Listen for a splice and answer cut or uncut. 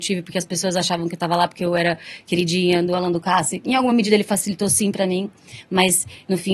uncut